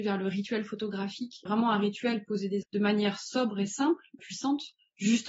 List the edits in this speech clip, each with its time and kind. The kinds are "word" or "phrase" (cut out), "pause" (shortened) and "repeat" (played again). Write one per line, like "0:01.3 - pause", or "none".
0:01.5 - word
0:02.6 - word
0:04.2 - word